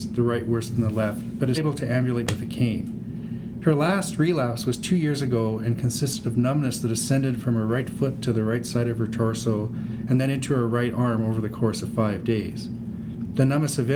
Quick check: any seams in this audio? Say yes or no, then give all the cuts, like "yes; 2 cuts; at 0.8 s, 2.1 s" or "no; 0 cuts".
yes; 1 cut; at 1.5 s